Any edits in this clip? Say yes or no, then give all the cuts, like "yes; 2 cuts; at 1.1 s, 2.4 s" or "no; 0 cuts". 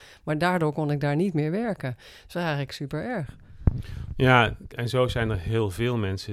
yes; 1 cut; at 4.7 s